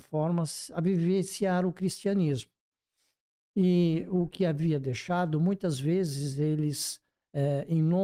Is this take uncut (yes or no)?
no